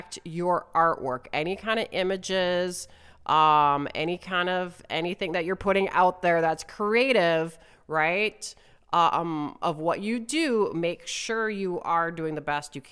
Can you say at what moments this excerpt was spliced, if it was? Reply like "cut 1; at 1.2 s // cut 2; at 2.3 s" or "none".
none